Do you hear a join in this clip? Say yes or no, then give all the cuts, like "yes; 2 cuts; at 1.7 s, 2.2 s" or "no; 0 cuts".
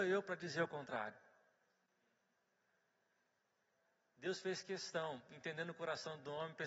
no; 0 cuts